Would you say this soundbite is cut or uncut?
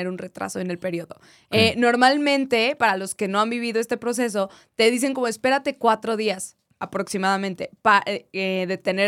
uncut